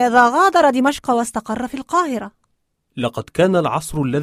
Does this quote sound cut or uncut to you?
uncut